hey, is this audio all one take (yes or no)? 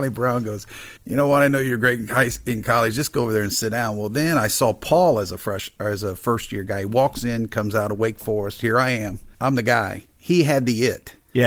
no